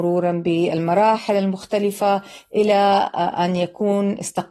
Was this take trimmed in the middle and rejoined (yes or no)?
no